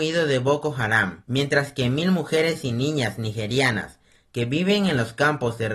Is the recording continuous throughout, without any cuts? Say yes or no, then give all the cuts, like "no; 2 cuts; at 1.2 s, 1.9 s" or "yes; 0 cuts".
yes; 0 cuts